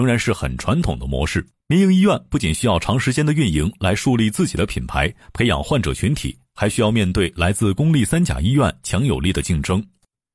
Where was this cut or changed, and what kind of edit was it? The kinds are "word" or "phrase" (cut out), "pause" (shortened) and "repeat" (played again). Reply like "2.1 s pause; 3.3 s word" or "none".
1.5 s pause